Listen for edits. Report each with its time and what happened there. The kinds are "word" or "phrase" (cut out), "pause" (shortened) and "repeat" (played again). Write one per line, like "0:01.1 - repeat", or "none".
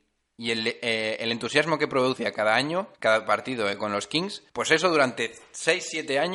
0:02.9 - pause
0:04.5 - pause